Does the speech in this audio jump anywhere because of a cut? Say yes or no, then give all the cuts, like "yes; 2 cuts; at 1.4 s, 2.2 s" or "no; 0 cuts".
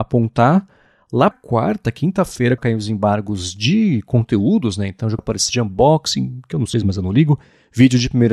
yes; 5 cuts; at 1.3 s, 2.6 s, 5.2 s, 5.5 s, 6.7 s